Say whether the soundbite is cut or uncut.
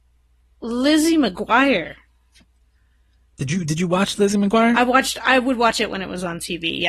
uncut